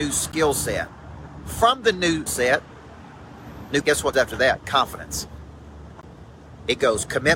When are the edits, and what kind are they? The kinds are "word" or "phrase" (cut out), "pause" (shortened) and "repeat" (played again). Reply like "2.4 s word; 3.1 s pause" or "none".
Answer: 2.3 s word; 3.8 s word; 4.1 s word

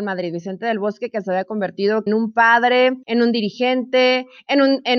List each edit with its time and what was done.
2.1 s phrase; 3.0 s pause

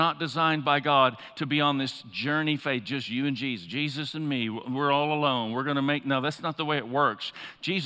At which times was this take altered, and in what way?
none

